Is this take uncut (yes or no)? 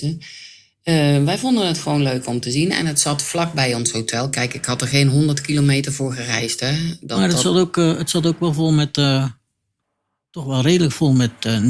yes